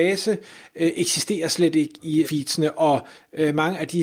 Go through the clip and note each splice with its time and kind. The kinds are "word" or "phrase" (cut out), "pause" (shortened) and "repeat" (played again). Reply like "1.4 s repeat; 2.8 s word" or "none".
2.2 s word